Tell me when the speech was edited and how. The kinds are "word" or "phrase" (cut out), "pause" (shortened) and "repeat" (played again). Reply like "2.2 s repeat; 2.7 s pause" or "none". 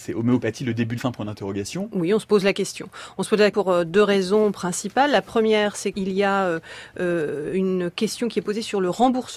1.0 s word; 3.5 s word; 5.9 s word